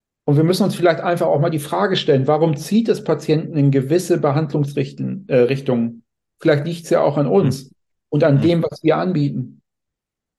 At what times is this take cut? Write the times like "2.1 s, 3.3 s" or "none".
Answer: none